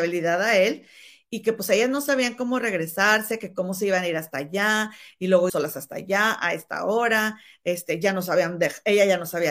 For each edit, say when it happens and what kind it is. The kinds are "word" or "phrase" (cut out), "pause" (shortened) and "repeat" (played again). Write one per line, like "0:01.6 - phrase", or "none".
0:05.5 - word